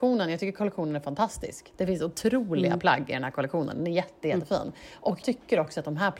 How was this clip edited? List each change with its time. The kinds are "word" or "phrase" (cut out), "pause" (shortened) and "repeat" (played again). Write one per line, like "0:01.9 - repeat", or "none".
0:05.2 - word